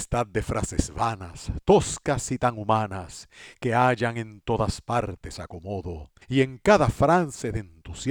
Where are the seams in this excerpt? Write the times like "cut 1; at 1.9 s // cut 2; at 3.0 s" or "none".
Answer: cut 1; at 6.2 s